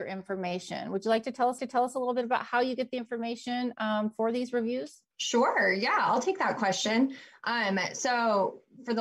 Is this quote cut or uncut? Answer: cut